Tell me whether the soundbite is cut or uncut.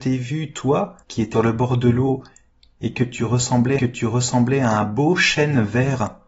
cut